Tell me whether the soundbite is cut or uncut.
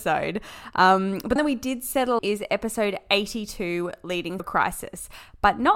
cut